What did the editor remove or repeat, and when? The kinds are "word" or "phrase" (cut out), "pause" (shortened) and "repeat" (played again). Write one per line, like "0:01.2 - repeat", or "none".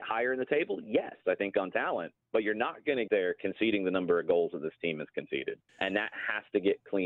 0:02.2 - pause
0:03.1 - word
0:05.7 - pause